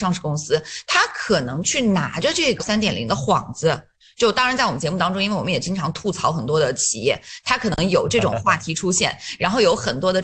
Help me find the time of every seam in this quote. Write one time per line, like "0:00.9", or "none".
0:02.6